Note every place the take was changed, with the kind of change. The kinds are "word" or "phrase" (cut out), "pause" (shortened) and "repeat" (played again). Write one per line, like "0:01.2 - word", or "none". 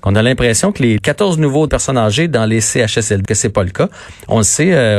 0:01.0 - word
0:01.7 - phrase
0:03.3 - word